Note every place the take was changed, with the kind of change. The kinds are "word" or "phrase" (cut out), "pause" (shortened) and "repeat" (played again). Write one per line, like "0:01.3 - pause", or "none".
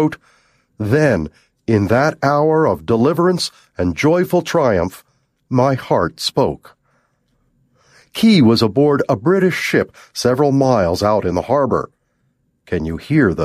none

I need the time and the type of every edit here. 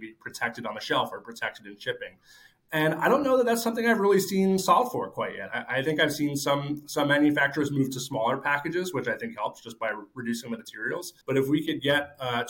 0:11.2 - pause

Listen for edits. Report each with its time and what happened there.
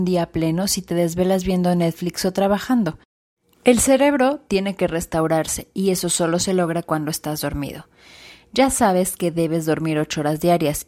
none

